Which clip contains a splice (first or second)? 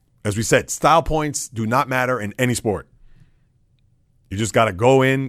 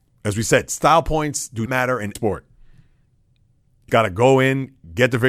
second